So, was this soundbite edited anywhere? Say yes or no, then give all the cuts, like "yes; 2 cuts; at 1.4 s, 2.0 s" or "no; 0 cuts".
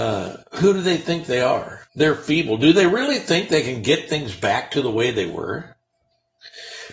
yes; 1 cut; at 1.9 s